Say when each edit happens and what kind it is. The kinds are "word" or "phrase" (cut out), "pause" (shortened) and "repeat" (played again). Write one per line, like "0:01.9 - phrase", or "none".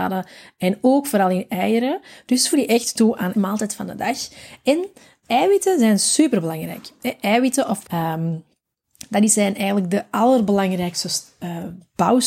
0:02.5 - word
0:03.3 - word
0:05.2 - word
0:07.8 - word